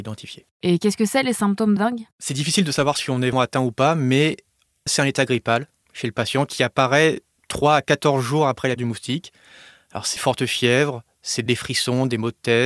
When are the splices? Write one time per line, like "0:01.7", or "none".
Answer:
0:01.8
0:03.3
0:04.9
0:08.8
0:10.2